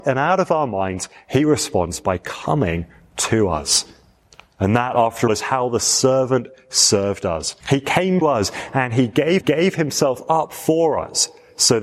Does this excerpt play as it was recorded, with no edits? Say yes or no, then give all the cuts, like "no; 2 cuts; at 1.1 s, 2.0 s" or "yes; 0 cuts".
no; 5 cuts; at 4.2 s, 5.3 s, 7.6 s, 8.2 s, 9.4 s